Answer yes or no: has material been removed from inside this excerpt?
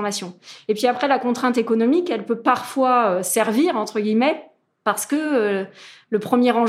no